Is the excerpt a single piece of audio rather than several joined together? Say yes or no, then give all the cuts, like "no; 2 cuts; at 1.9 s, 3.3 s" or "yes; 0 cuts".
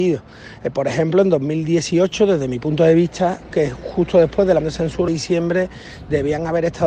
no; 3 cuts; at 3.5 s, 4.6 s, 5.1 s